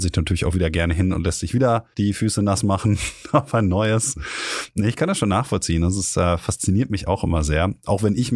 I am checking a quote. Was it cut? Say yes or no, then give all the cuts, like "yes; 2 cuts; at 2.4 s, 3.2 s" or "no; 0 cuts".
yes; 1 cut; at 1.9 s